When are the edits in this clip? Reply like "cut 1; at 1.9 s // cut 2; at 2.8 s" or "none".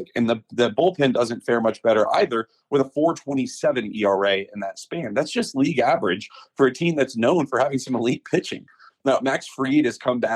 none